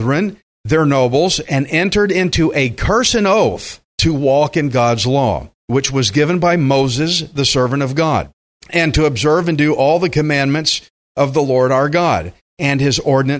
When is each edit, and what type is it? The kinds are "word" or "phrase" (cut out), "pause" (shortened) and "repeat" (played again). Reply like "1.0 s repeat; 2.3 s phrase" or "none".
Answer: 3.9 s pause; 5.6 s pause